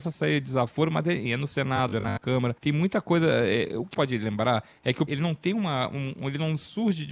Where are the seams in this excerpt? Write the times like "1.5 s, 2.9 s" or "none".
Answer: 1.3 s, 2.6 s, 3.9 s, 5.1 s

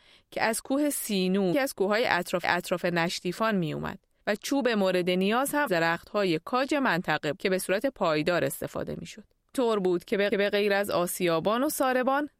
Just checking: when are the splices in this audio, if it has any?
1.5 s, 2.4 s, 4.2 s, 5.7 s, 7.4 s, 9.5 s, 10.3 s

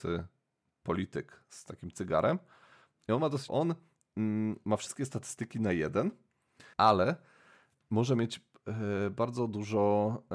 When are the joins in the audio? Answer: 3.5 s, 6.7 s

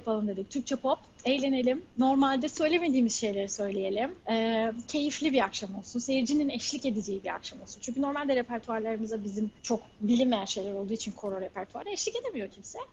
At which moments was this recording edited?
1.9 s, 4.2 s, 9.6 s

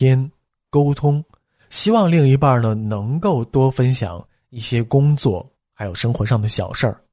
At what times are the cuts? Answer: none

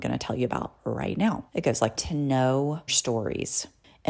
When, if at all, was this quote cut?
1.5 s, 2.0 s, 2.9 s

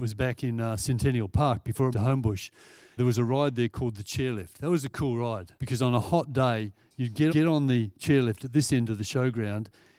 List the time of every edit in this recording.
1.9 s, 3.0 s, 5.6 s, 7.3 s

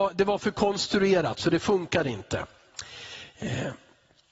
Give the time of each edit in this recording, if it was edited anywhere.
none

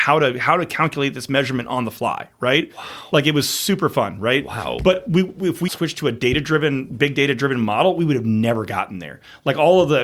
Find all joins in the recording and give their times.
5.7 s

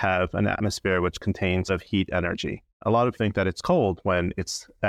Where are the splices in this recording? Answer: 1.7 s, 2.7 s, 3.1 s

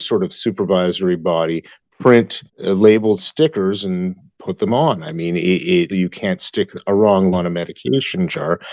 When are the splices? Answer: 2.5 s, 3.2 s, 5.9 s, 7.3 s

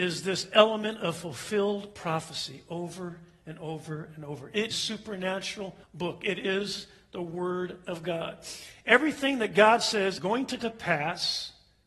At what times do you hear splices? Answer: 4.7 s, 5.8 s, 10.2 s, 10.6 s

